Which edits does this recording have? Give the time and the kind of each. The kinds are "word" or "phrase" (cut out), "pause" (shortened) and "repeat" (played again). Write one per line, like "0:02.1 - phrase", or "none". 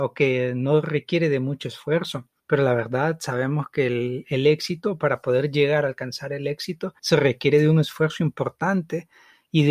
0:02.4 - pause
0:07.0 - pause